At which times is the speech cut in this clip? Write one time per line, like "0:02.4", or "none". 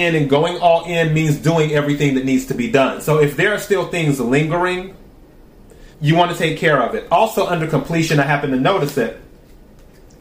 0:05.9

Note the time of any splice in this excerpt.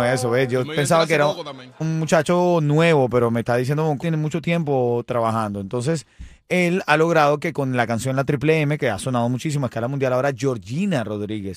0:01.8
0:04.0

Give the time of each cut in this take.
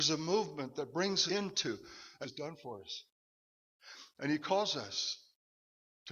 0:01.3
0:02.2

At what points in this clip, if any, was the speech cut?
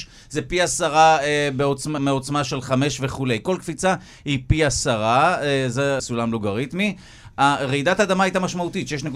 0:02.0
0:06.0

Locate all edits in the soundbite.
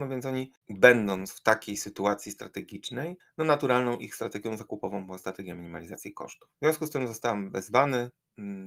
0:03.2
0:06.5

